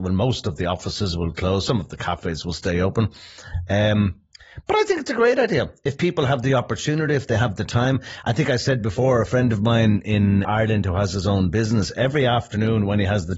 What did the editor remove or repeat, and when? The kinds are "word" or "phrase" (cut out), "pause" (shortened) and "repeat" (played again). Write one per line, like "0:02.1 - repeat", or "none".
0:10.4 - word